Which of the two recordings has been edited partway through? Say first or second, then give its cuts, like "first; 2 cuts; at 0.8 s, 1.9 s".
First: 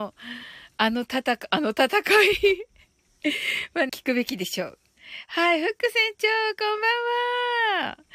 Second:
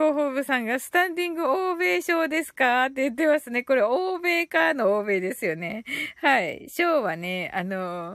first; 1 cut; at 3.9 s